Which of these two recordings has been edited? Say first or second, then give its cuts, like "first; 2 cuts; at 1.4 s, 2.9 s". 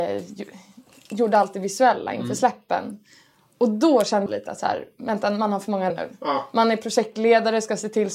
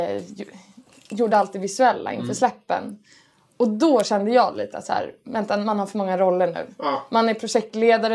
first; 2 cuts; at 4.3 s, 5.9 s